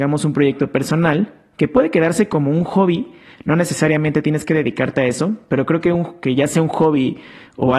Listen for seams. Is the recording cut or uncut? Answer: uncut